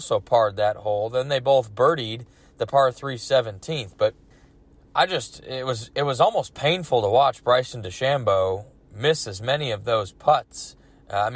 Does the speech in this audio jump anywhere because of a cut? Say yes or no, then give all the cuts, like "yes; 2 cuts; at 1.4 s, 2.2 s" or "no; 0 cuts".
yes; 1 cut; at 4.3 s